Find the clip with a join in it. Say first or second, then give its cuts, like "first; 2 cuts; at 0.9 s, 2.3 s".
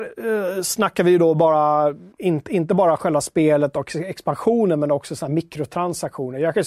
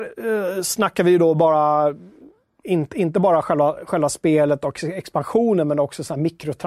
first; 2 cuts; at 2.1 s, 3.0 s